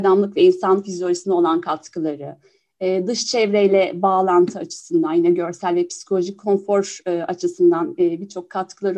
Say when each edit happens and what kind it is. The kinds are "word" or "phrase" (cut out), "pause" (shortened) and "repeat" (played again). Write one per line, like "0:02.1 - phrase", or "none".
none